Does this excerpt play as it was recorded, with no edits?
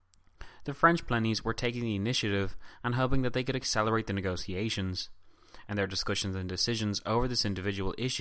yes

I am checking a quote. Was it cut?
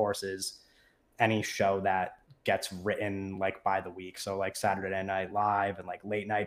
no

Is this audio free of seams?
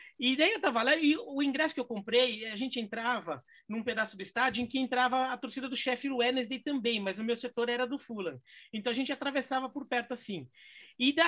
yes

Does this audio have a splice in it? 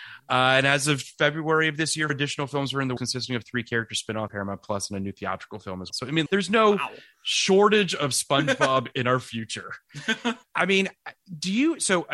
yes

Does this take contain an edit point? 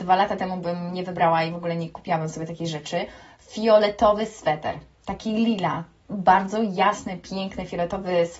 no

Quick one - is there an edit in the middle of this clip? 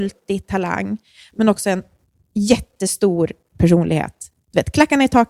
no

